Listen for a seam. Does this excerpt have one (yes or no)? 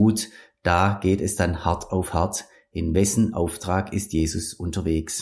no